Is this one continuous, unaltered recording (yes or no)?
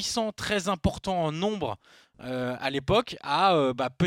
yes